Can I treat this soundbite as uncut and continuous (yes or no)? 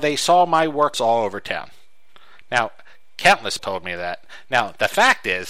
no